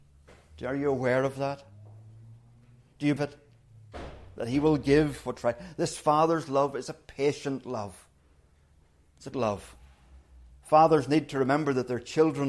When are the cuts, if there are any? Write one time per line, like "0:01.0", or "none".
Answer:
0:03.2
0:09.3

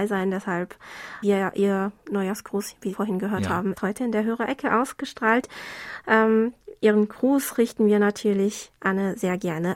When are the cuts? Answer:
0:01.2
0:02.9
0:03.7

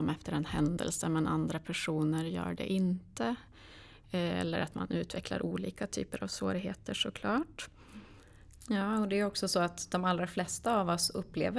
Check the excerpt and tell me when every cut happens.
none

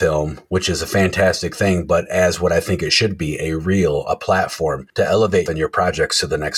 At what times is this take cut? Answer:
0:05.5

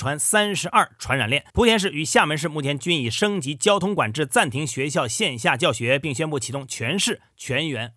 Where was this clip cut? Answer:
0:01.5

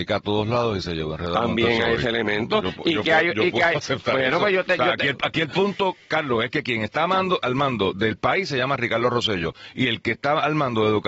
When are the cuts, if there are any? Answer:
none

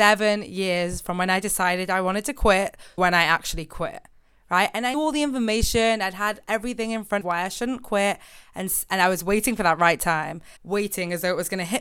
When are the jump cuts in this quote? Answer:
0:03.0
0:04.9
0:07.2
0:10.6

